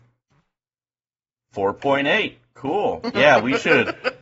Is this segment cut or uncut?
uncut